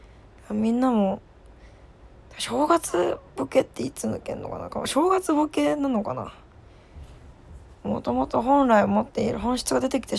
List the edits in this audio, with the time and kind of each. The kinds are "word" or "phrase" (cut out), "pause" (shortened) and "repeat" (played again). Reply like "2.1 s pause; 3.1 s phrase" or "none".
7.8 s pause